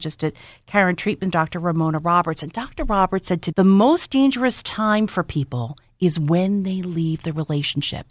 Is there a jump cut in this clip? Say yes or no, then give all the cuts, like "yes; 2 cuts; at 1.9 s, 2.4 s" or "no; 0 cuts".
yes; 2 cuts; at 1.3 s, 3.5 s